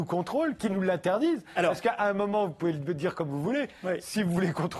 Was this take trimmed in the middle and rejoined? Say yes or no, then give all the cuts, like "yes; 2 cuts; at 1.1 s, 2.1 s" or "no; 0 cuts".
no; 0 cuts